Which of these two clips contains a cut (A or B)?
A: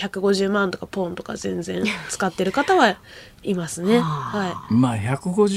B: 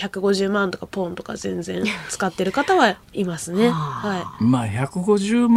B